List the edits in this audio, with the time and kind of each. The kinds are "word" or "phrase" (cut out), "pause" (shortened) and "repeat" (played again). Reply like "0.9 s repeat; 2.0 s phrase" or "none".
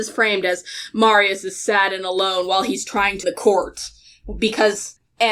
3.2 s word